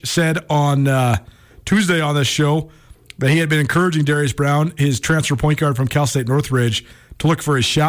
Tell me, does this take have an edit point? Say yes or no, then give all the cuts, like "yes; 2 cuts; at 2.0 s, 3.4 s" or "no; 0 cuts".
no; 0 cuts